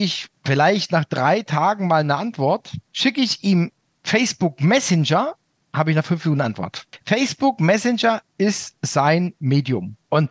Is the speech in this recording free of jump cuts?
yes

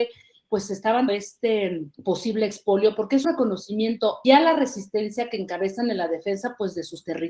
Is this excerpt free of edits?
no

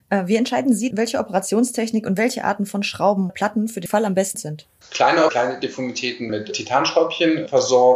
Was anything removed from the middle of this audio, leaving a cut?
yes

